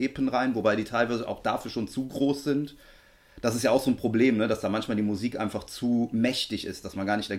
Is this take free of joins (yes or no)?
yes